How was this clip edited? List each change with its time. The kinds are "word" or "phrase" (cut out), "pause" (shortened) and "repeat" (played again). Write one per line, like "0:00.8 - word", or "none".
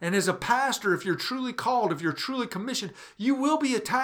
none